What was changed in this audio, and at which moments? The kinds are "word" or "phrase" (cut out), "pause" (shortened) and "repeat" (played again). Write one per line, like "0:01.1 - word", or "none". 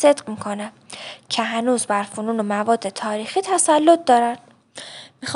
none